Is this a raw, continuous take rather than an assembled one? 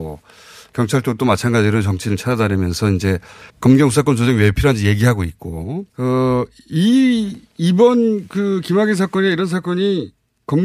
no; 2 cuts; at 3.5 s, 5.9 s

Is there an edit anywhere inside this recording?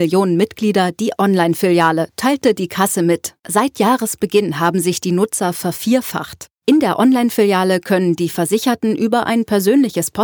yes; 2 cuts; at 3.4 s, 6.6 s

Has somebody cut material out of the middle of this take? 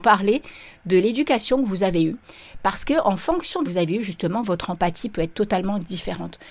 yes; 1 cut; at 3.6 s

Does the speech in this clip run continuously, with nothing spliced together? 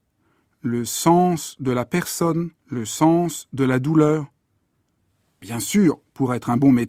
no; 1 cut; at 2.6 s

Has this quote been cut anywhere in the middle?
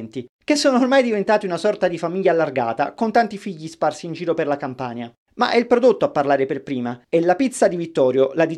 yes; 1 cut; at 7.0 s

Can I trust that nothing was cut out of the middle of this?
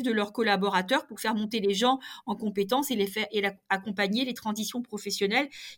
yes; 0 cuts

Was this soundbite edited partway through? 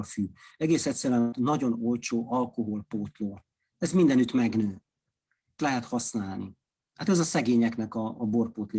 yes; 2 cuts; at 1.3 s, 5.6 s

